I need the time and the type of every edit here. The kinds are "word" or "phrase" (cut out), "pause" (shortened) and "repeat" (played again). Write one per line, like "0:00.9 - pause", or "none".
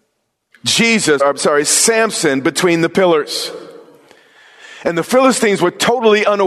0:01.2 - word